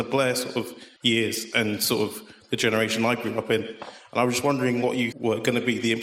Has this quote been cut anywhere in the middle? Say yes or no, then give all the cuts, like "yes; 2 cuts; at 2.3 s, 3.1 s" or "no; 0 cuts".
yes; 1 cut; at 5.1 s